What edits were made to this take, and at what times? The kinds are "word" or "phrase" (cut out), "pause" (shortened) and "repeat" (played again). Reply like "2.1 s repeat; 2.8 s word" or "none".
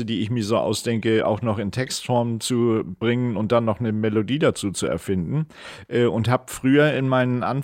none